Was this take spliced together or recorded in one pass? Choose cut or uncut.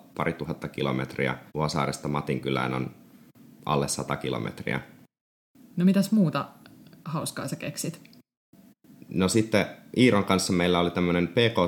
cut